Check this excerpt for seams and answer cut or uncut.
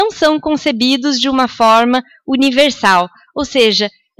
uncut